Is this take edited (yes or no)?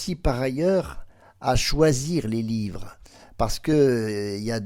no